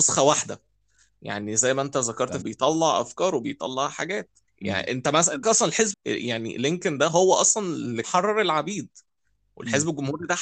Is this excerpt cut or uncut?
cut